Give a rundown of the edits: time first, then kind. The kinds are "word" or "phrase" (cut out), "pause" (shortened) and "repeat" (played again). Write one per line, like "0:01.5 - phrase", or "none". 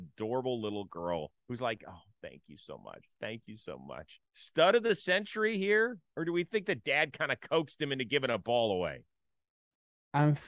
0:01.4 - pause
0:04.2 - pause
0:06.1 - pause